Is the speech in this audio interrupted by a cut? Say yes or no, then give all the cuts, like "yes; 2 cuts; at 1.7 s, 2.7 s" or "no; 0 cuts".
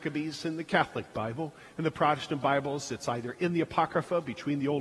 no; 0 cuts